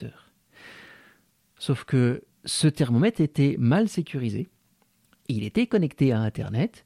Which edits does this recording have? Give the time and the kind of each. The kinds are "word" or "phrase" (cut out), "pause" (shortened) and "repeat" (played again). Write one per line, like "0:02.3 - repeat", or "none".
0:02.3 - pause